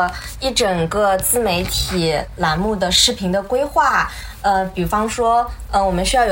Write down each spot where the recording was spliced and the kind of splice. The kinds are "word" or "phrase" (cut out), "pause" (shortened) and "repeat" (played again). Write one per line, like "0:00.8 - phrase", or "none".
none